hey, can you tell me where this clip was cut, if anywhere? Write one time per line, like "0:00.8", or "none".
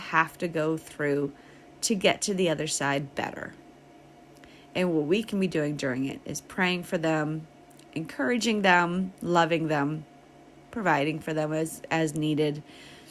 none